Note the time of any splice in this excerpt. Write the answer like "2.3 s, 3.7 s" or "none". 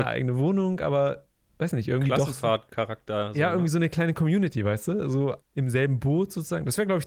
2.7 s, 5.4 s